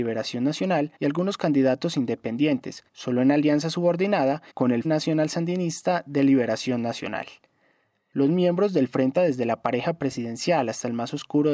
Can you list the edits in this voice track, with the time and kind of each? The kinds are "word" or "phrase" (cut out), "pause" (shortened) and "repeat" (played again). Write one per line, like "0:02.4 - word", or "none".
0:01.0 - pause
0:02.9 - pause
0:04.5 - pause
0:04.8 - word
0:09.2 - word